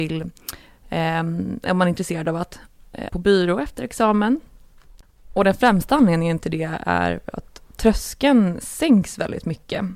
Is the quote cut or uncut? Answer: cut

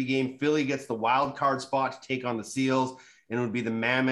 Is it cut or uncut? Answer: uncut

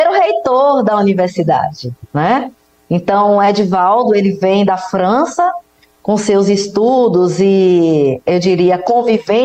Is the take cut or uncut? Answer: uncut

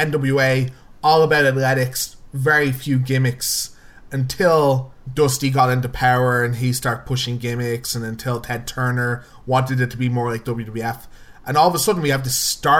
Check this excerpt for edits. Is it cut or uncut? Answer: uncut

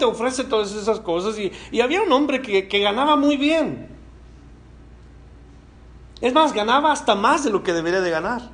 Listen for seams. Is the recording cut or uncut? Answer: uncut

